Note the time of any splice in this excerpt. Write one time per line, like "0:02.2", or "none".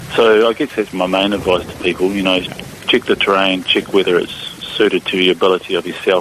0:00.9